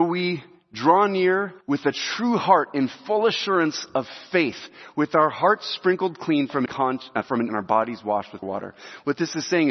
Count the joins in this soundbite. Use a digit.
4